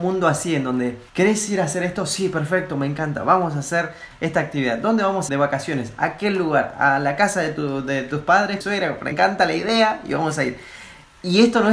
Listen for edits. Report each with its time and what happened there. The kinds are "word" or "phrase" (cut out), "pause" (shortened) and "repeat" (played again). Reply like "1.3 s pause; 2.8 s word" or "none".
1.1 s pause; 5.3 s word; 8.6 s phrase; 9.1 s word